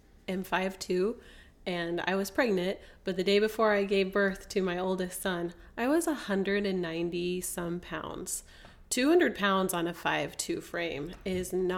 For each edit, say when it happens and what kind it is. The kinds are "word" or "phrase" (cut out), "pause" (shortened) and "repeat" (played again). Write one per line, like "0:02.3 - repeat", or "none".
none